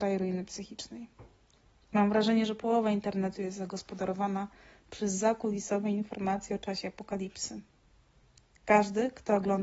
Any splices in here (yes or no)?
no